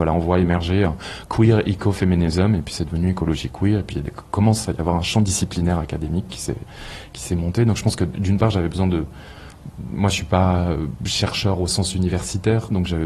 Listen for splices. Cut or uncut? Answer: uncut